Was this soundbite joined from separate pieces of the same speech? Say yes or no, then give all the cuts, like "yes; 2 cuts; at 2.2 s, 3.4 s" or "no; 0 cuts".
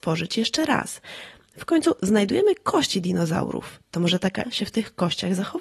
yes; 1 cut; at 4.4 s